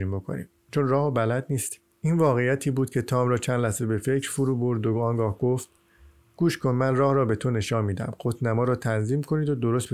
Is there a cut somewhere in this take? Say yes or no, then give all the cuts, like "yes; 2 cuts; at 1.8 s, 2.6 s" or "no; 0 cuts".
no; 0 cuts